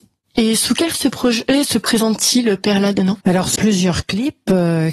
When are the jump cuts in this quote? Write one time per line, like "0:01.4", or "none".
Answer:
0:00.9
0:03.2
0:03.6